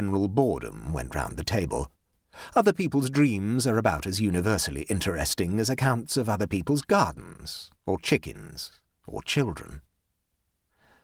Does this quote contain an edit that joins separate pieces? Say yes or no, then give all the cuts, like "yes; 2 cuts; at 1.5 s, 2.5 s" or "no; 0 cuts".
no; 0 cuts